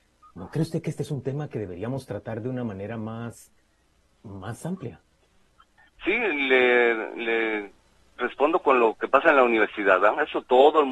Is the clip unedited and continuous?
yes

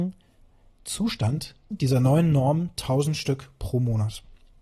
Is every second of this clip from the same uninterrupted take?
no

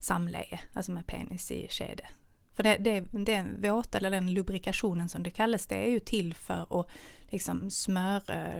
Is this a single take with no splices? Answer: yes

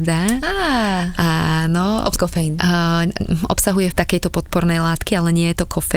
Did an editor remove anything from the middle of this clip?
yes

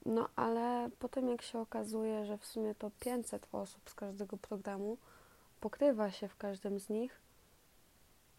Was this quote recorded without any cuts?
yes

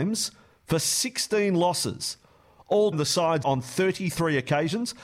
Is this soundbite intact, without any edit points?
no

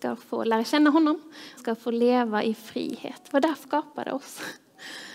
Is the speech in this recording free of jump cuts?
no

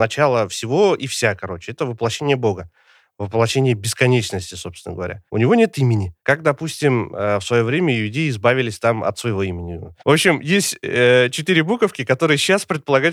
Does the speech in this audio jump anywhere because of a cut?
yes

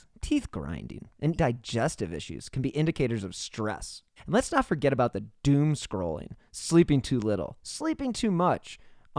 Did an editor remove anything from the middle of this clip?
yes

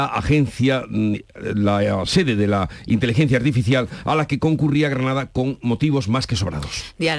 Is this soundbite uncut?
yes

